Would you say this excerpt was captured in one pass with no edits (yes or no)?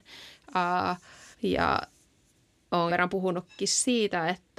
no